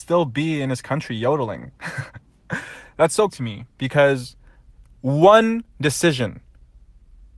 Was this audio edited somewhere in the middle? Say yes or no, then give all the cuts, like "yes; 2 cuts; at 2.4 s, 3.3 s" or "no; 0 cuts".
yes; 2 cuts; at 3.3 s, 3.7 s